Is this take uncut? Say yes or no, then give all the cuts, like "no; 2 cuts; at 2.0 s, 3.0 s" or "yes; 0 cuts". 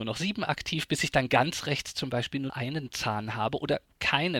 no; 1 cut; at 2.5 s